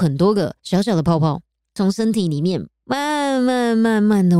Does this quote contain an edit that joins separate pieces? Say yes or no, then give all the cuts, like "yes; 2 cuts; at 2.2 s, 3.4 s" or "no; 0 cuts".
no; 0 cuts